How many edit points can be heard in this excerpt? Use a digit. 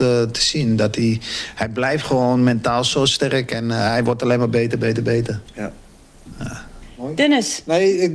0